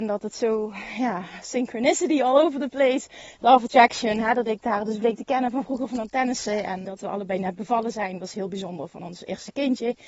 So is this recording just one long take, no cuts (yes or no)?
no